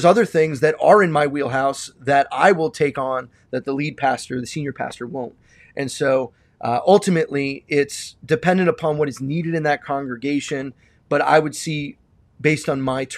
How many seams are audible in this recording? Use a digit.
0